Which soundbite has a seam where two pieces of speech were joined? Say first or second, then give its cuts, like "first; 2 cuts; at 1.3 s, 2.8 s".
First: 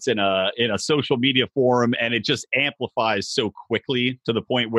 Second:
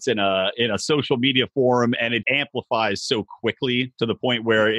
second; 1 cut; at 2.2 s